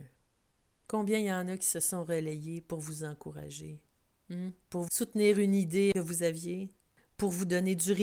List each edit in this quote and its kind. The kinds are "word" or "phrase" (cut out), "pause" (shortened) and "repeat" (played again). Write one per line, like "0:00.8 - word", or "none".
0:04.9 - word